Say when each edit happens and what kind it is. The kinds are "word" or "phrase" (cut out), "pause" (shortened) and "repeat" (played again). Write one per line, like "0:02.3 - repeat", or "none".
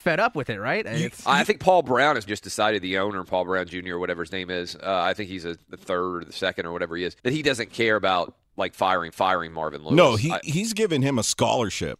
0:02.3 - word
0:07.2 - pause
0:09.1 - repeat